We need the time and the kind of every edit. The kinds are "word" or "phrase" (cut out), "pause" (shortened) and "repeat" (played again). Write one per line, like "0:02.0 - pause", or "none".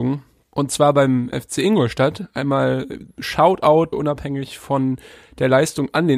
0:01.3 - word
0:03.9 - word